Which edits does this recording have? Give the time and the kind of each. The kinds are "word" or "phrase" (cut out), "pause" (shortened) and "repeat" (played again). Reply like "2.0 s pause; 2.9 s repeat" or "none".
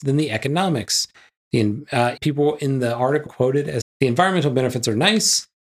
2.2 s word; 3.3 s word; 3.8 s word